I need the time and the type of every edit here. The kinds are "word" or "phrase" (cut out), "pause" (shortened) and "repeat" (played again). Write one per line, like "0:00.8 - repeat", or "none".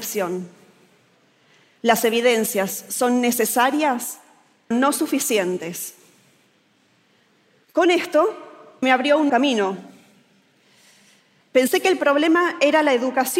0:04.7 - word
0:08.8 - word
0:09.3 - word